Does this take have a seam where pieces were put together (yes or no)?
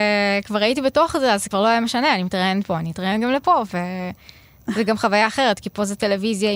no